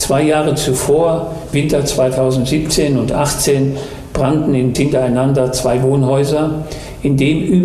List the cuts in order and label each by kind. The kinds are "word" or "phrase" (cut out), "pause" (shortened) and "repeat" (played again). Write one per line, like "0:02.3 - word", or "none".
0:01.5 - word
0:04.7 - phrase